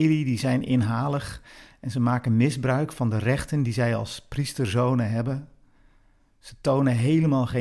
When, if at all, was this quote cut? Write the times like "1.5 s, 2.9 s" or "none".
none